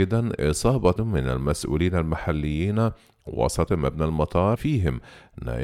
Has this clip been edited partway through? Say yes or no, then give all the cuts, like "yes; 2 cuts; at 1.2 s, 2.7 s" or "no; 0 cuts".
yes; 3 cuts; at 1.0 s, 3.7 s, 4.6 s